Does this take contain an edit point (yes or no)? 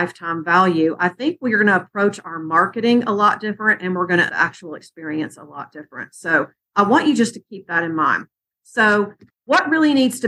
yes